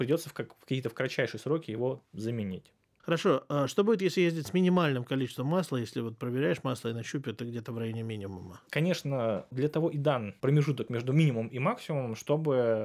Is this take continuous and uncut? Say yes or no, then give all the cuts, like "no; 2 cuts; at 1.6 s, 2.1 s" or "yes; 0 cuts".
no; 1 cut; at 8.7 s